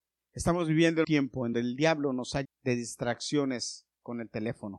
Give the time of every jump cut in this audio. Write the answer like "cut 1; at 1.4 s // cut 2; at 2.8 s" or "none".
cut 1; at 1.0 s // cut 2; at 1.5 s // cut 3; at 2.4 s